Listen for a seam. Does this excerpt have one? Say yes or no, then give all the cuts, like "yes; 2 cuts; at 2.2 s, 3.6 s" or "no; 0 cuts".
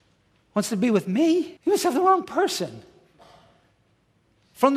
yes; 1 cut; at 1.6 s